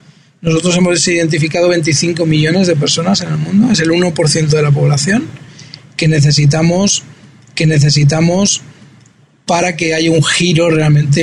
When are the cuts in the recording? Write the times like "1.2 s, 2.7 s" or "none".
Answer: 7.5 s